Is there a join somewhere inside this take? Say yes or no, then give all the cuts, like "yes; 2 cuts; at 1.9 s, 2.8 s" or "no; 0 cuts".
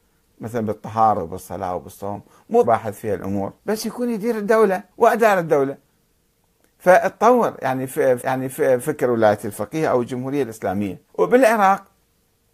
yes; 6 cuts; at 1.2 s, 2.6 s, 3.6 s, 4.9 s, 8.2 s, 11.1 s